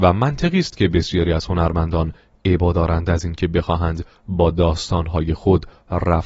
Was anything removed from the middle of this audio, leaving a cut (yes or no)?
no